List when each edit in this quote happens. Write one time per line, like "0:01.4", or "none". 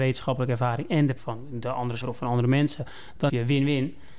0:01.2
0:02.0
0:03.3